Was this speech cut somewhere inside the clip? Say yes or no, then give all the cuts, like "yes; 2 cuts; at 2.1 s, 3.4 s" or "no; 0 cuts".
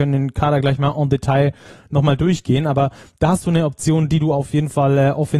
no; 0 cuts